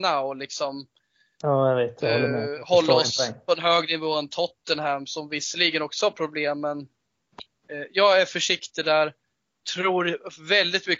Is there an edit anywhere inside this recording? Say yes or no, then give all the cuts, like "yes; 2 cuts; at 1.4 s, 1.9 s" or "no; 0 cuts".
no; 0 cuts